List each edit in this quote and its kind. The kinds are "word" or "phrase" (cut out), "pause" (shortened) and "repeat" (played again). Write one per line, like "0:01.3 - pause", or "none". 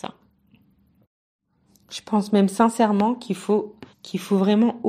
0:03.9 - pause